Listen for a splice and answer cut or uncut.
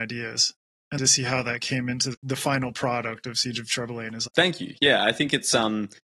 cut